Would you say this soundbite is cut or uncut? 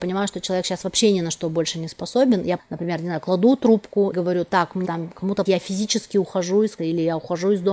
cut